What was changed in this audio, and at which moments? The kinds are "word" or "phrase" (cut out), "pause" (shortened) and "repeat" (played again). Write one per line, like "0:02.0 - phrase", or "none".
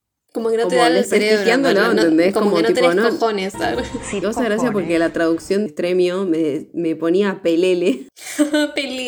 0:04.2 - phrase
0:05.7 - phrase